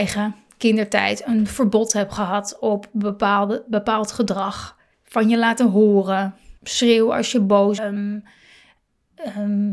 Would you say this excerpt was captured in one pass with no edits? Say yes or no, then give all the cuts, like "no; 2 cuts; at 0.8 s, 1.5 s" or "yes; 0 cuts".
no; 3 cuts; at 4.9 s, 6.6 s, 7.8 s